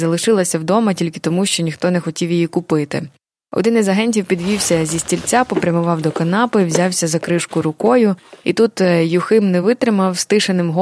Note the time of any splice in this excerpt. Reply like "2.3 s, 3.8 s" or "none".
none